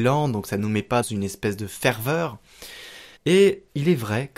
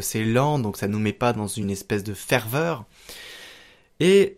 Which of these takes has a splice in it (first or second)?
first